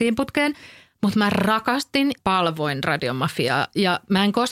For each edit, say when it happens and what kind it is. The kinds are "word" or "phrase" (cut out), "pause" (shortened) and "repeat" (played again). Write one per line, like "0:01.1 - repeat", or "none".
0:02.2 - word